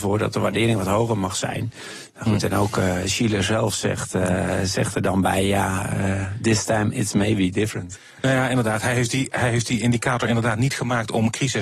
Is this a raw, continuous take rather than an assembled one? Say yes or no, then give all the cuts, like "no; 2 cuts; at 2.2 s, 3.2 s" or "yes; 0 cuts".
yes; 0 cuts